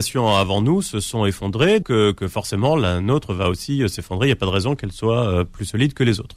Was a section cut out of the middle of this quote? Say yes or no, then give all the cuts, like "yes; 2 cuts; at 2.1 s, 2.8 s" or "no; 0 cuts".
yes; 1 cut; at 1.8 s